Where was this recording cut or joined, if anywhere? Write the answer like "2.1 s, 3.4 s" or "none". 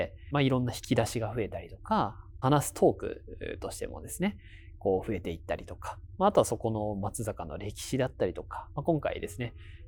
2.4 s